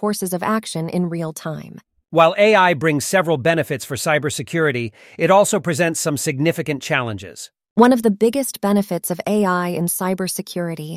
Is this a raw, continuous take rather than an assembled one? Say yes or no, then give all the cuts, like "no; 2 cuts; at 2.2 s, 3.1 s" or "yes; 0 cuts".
yes; 0 cuts